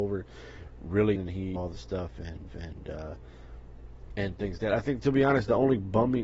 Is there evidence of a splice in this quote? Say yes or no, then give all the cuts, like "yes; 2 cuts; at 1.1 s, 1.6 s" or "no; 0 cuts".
yes; 4 cuts; at 1.2 s, 1.6 s, 2.5 s, 4.6 s